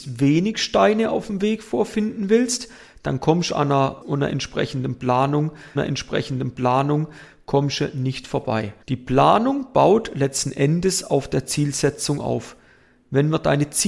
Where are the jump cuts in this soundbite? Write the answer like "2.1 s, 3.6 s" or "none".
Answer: 4.0 s, 5.8 s, 8.8 s